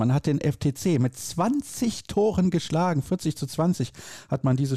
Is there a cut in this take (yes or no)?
no